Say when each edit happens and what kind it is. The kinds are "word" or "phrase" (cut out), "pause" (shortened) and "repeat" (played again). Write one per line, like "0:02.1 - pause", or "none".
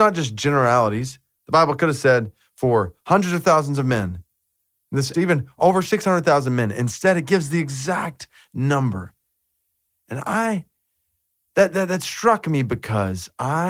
0:05.1 - word